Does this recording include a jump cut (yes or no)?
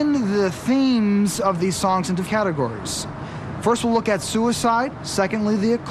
yes